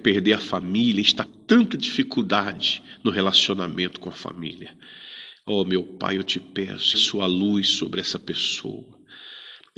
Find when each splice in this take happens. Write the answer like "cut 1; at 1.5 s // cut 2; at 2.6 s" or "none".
cut 1; at 1.3 s // cut 2; at 6.9 s